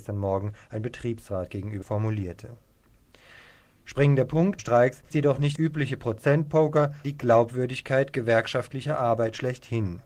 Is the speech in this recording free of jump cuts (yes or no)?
no